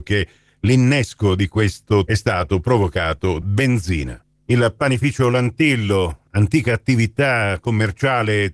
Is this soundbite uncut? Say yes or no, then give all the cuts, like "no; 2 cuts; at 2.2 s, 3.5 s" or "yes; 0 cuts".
no; 2 cuts; at 2.1 s, 3.4 s